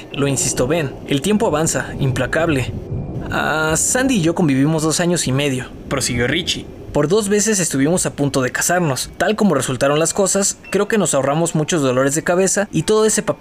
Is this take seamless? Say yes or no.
yes